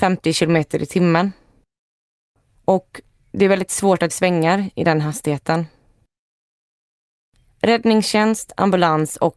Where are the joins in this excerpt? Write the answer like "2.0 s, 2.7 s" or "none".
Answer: 4.1 s